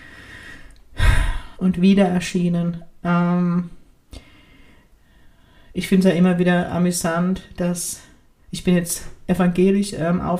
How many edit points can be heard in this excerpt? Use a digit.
0